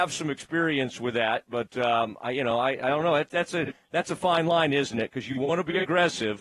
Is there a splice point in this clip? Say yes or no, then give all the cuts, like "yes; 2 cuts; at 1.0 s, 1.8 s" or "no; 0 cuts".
no; 0 cuts